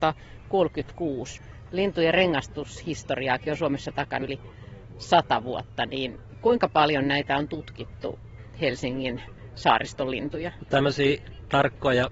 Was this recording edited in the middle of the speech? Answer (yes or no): yes